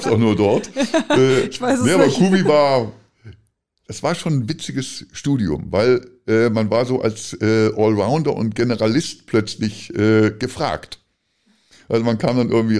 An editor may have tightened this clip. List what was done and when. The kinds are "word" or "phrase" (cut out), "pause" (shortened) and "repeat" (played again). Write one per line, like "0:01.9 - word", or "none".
none